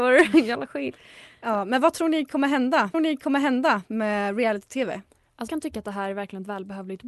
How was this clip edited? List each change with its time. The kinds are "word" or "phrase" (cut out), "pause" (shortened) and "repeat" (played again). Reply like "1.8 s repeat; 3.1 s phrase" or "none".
2.9 s repeat; 5.5 s word